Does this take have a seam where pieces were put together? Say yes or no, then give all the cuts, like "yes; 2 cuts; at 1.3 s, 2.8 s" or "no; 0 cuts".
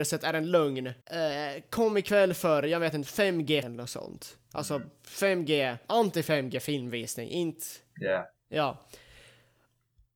yes; 2 cuts; at 1.0 s, 3.6 s